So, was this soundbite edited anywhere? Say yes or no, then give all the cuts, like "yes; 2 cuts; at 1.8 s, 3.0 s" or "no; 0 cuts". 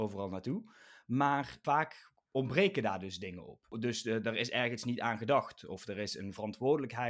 no; 0 cuts